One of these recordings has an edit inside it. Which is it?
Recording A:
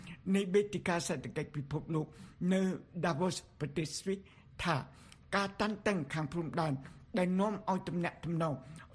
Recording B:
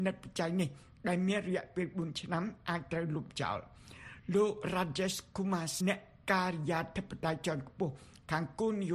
B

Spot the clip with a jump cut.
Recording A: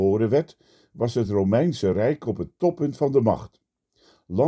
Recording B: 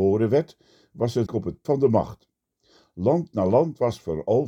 B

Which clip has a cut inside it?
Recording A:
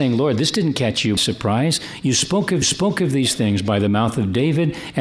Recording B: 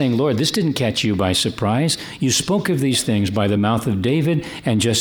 A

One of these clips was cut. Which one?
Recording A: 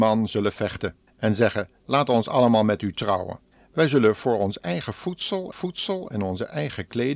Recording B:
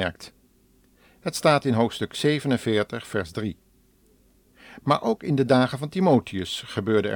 A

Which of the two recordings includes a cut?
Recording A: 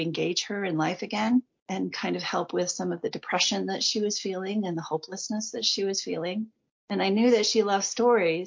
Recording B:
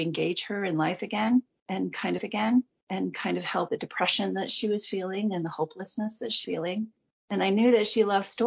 B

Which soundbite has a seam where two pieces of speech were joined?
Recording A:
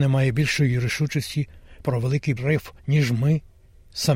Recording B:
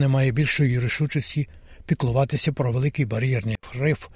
A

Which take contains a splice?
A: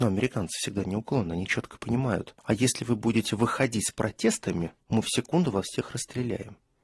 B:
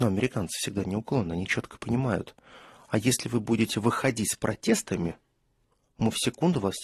A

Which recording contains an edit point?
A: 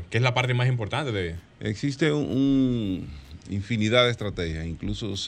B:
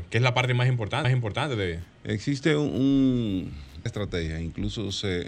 B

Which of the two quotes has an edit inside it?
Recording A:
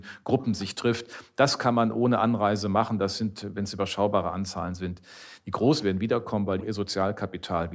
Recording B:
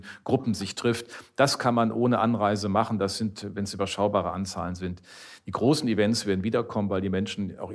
A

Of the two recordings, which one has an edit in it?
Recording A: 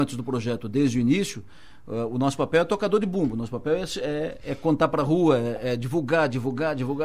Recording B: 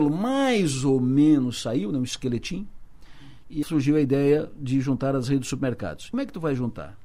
B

